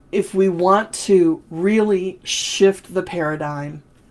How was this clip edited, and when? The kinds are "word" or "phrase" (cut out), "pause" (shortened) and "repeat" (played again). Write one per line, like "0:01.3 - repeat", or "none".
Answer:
none